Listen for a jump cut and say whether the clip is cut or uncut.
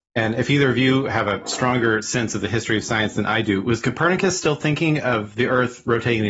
uncut